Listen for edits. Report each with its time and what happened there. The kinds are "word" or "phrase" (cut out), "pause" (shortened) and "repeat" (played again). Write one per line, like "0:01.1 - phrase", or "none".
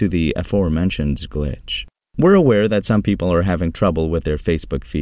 none